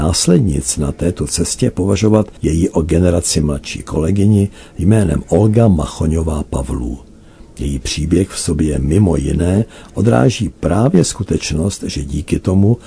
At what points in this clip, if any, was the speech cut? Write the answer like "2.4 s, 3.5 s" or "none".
2.4 s